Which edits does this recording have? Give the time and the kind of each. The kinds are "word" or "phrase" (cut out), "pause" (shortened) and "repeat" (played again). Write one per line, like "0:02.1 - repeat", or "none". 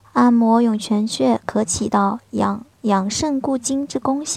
0:02.7 - pause